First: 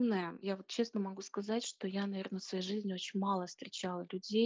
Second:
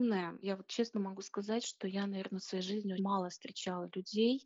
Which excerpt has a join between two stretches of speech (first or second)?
second